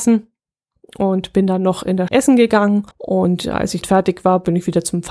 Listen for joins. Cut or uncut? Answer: cut